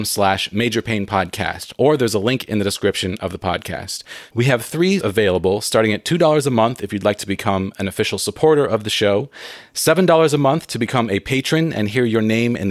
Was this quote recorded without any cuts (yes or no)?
no